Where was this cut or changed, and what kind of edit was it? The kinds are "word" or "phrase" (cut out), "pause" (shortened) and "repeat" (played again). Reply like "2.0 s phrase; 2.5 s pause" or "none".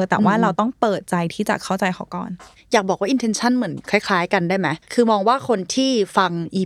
4.8 s pause